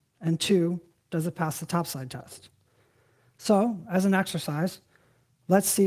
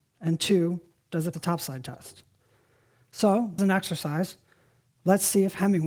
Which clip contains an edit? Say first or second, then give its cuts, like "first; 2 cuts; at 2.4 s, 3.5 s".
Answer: second; 2 cuts; at 1.3 s, 3.6 s